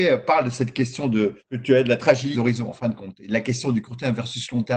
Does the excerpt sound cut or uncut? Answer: cut